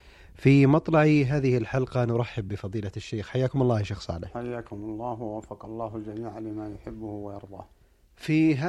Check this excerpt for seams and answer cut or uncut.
uncut